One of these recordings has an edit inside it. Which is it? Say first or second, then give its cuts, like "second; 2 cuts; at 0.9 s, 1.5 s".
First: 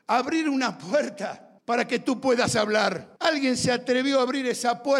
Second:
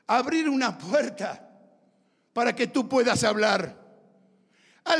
first; 2 cuts; at 1.6 s, 3.2 s